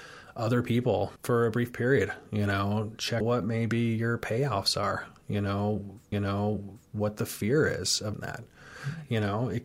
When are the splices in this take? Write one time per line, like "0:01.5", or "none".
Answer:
0:01.2
0:03.2
0:06.1
0:08.1